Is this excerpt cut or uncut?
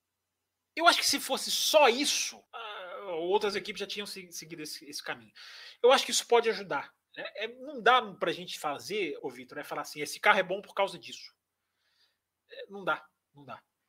cut